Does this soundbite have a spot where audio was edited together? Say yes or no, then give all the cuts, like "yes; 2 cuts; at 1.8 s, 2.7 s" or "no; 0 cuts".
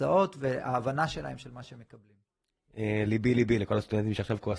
no; 0 cuts